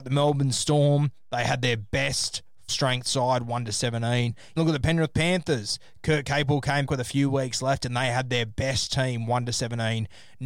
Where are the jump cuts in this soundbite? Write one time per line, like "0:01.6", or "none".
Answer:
0:02.7
0:04.6
0:06.9